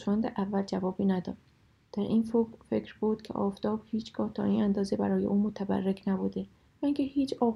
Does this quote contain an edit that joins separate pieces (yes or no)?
no